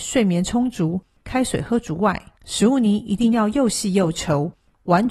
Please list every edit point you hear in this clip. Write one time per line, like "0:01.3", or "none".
0:02.4